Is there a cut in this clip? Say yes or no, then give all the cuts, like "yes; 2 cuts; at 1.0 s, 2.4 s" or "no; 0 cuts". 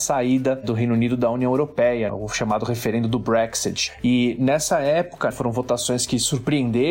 yes; 2 cuts; at 2.1 s, 5.3 s